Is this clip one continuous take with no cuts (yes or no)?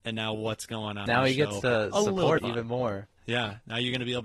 no